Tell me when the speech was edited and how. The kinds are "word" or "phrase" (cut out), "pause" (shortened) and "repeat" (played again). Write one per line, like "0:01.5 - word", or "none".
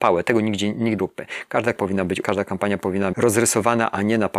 0:01.0 - word
0:01.8 - word
0:02.2 - word
0:03.1 - word